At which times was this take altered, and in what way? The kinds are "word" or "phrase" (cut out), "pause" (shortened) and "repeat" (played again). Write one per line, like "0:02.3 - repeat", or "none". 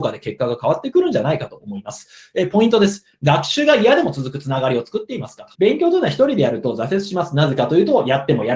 0:05.5 - pause